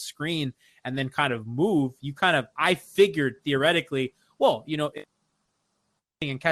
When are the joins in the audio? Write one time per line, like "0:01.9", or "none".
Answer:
none